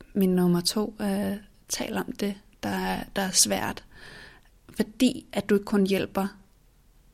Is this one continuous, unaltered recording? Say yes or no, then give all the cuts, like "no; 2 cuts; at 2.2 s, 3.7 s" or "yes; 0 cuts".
yes; 0 cuts